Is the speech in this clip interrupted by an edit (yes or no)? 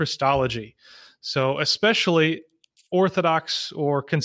no